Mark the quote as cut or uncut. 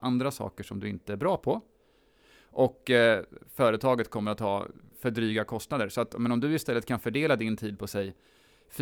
cut